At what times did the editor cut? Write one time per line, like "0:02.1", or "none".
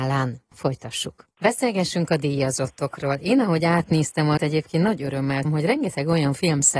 0:04.4
0:05.4